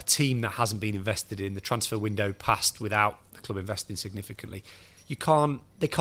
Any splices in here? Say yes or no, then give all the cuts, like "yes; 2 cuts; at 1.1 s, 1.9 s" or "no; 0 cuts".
no; 0 cuts